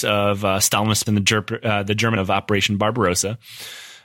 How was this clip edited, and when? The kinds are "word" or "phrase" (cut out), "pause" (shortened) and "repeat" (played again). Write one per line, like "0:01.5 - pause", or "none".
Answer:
0:01.1 - word
0:02.2 - word

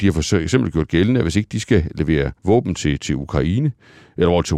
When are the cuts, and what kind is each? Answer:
0:02.4 - pause

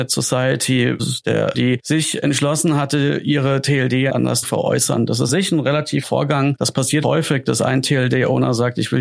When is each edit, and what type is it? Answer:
0:01.0 - phrase
0:01.5 - phrase
0:04.1 - word
0:04.4 - word
0:05.3 - word
0:06.0 - word
0:07.0 - phrase

